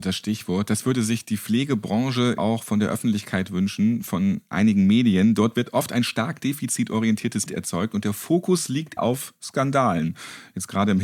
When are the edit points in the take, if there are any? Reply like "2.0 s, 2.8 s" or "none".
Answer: 2.4 s, 7.5 s, 9.0 s